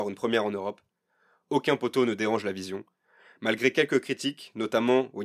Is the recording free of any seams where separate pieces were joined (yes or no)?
yes